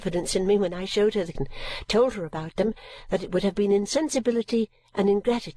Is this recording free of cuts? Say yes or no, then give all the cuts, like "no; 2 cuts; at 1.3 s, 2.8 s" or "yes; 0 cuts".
no; 1 cut; at 1.3 s